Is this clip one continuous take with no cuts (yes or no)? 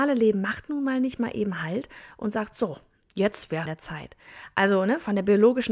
no